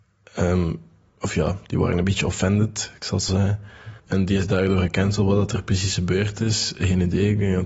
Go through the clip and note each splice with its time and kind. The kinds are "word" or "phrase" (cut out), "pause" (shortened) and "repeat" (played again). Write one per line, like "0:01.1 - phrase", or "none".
0:03.3 - word
0:04.0 - pause